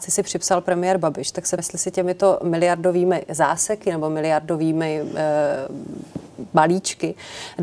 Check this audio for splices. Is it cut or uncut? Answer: cut